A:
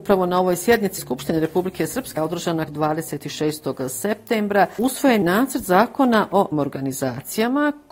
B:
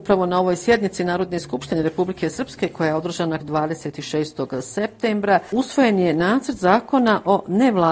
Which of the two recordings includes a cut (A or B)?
A